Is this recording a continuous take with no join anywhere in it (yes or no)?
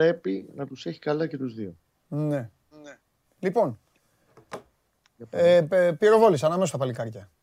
yes